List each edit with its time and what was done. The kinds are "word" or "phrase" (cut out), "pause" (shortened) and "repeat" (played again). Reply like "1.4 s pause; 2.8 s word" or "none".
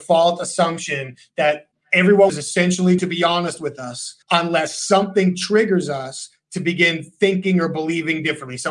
2.3 s phrase; 3.0 s word; 4.2 s pause